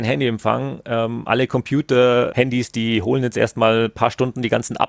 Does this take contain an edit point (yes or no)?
no